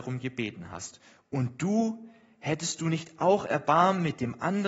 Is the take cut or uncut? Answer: uncut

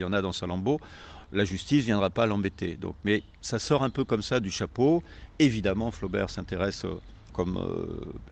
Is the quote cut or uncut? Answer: cut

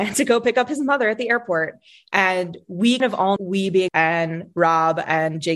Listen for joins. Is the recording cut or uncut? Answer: cut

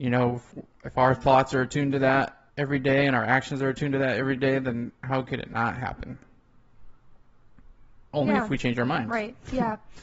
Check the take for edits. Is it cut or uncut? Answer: cut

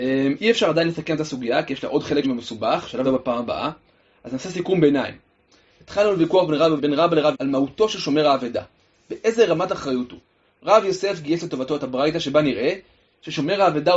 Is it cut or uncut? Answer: cut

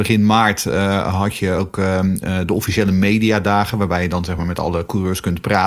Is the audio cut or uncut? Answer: uncut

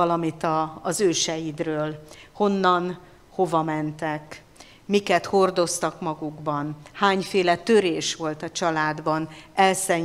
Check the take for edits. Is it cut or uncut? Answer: uncut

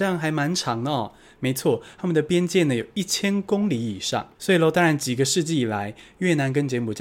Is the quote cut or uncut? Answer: cut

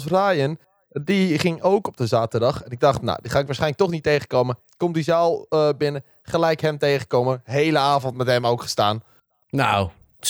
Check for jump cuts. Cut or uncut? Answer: uncut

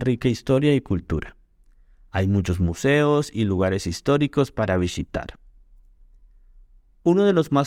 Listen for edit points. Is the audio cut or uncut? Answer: uncut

